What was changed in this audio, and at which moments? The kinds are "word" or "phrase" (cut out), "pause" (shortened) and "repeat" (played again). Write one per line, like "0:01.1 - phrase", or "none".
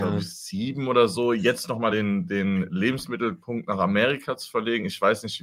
none

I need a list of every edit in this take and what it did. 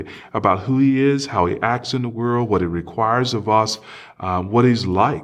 none

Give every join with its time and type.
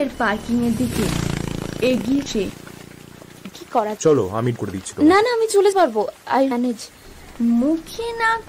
0:02.3 - word
0:03.5 - word
0:04.0 - word
0:04.6 - word
0:05.7 - word
0:06.5 - word

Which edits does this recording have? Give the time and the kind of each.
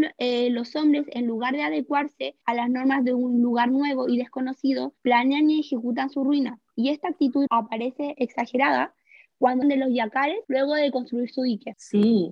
0:02.4 - pause
0:05.0 - pause
0:06.7 - pause
0:07.5 - word
0:08.1 - word
0:09.6 - phrase
0:10.4 - pause

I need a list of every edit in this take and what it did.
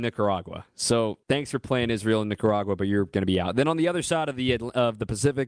0:01.2 - pause

